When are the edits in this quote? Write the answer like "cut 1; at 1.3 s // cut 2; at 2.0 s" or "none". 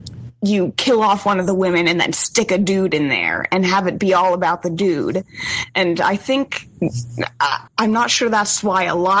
cut 1; at 7.7 s